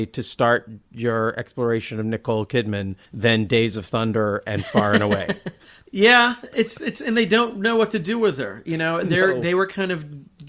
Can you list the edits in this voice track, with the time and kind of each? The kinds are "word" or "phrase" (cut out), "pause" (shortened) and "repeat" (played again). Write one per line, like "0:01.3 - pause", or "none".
0:03.1 - pause

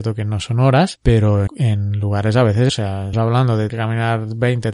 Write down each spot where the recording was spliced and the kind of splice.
0:01.5 - word
0:02.7 - word
0:03.1 - word
0:03.7 - word

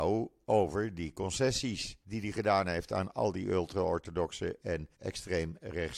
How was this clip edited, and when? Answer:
0:02.0 - pause
0:04.9 - pause

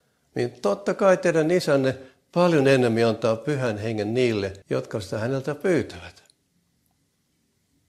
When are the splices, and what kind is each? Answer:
0:04.6 - pause

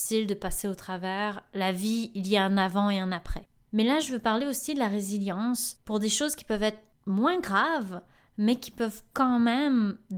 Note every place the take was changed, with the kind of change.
none

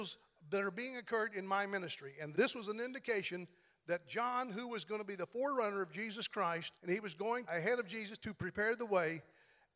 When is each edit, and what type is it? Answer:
0:02.3 - word
0:06.8 - pause
0:07.5 - word

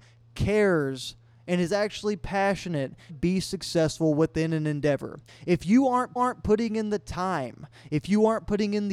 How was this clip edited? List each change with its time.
0:03.1 - phrase
0:05.3 - pause
0:06.2 - repeat

